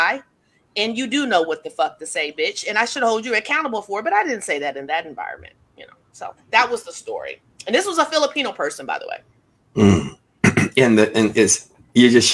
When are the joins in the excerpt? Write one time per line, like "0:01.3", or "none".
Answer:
none